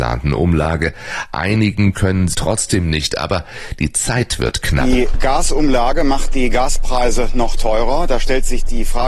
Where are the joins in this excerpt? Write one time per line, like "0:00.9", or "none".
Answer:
0:02.3
0:05.1